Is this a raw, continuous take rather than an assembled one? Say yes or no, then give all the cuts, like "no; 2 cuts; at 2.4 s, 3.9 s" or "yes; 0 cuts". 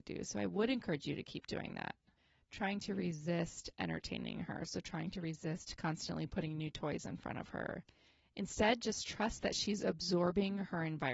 yes; 0 cuts